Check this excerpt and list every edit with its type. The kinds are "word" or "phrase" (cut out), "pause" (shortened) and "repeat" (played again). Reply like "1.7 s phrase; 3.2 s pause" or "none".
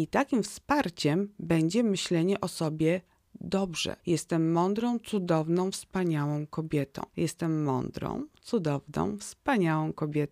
4.0 s pause; 7.1 s pause

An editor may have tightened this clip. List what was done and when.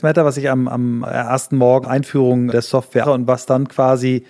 1.0 s word; 1.8 s word; 2.5 s word; 3.0 s word

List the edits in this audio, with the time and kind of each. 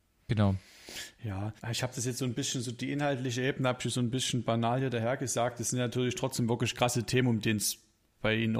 1.6 s pause

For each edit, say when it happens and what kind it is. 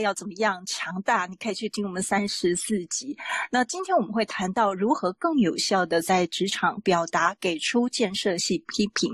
none

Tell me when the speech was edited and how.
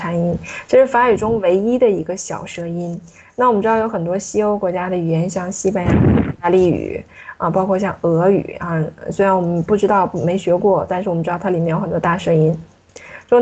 none

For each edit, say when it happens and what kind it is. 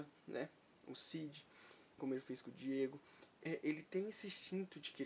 2.0 s word; 3.3 s pause

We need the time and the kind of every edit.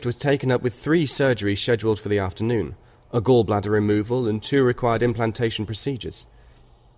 none

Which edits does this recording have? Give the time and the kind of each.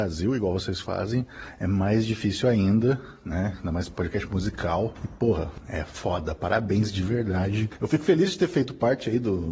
none

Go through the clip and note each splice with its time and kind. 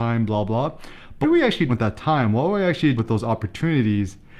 1.2 s word; 1.7 s word; 3.0 s word

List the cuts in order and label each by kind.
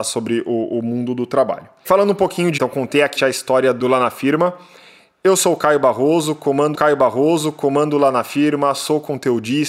2.6 s word; 3.2 s word; 6.7 s repeat

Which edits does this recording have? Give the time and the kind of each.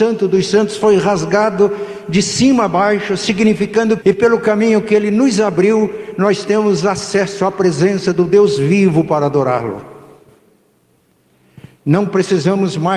4.0 s phrase

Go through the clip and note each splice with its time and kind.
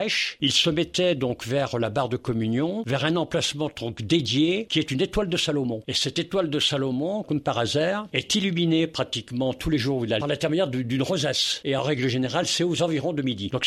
10.2 s phrase

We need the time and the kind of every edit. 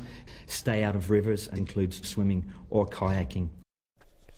1.6 s word; 2.0 s word

